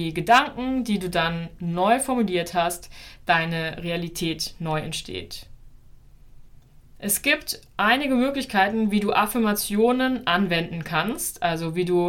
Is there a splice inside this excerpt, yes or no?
no